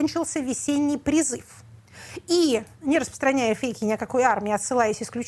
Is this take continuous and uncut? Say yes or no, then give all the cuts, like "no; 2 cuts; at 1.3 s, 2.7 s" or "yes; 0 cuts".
no; 1 cut; at 2.7 s